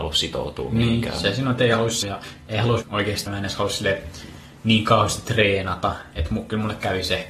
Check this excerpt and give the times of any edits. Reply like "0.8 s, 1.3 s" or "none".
2.0 s, 2.8 s, 3.3 s